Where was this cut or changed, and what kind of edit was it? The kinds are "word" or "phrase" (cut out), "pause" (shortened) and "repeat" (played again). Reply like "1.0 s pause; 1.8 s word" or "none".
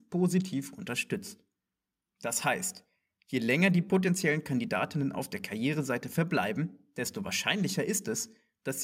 none